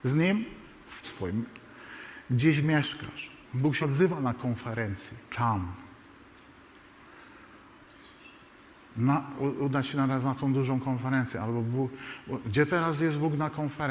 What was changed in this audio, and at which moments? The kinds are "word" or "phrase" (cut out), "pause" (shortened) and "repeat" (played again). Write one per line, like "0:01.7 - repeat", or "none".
0:01.0 - word
0:02.6 - word
0:03.4 - pause
0:03.8 - word
0:05.3 - pause
0:09.4 - word